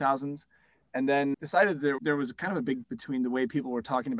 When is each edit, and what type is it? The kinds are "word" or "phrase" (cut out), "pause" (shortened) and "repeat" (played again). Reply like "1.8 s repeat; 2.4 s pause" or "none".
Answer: 1.3 s word; 2.0 s word; 2.8 s word